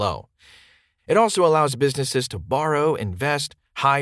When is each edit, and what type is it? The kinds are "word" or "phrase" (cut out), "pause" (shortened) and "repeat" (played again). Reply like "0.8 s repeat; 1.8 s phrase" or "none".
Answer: none

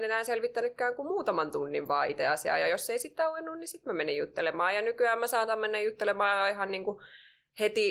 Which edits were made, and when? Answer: none

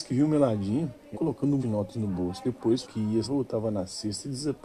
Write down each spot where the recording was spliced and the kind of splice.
1.1 s word; 1.6 s word; 2.8 s word; 3.2 s word

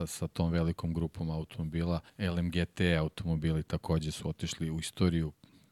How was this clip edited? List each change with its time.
2.1 s pause

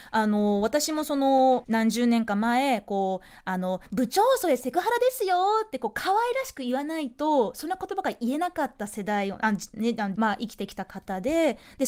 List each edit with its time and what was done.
1.6 s phrase; 10.2 s phrase

